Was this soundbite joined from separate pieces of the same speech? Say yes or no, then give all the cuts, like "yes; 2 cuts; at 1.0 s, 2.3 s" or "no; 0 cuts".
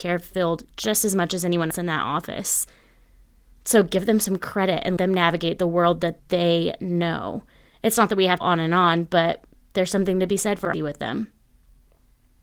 yes; 4 cuts; at 1.7 s, 5.0 s, 8.4 s, 10.7 s